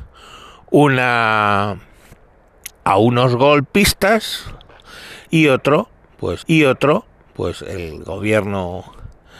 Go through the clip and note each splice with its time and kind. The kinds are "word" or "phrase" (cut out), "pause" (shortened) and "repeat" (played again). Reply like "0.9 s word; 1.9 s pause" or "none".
2.8 s word; 6.4 s repeat